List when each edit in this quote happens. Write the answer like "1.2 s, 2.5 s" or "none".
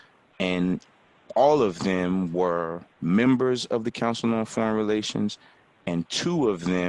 2.9 s